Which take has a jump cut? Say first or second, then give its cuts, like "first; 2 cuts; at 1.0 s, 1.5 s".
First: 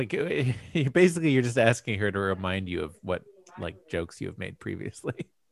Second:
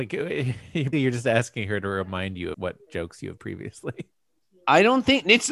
second; 4 cuts; at 0.9 s, 2.5 s, 2.9 s, 3.4 s